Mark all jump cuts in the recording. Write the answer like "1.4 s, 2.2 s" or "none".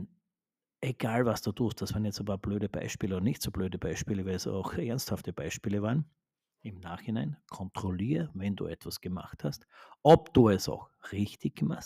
none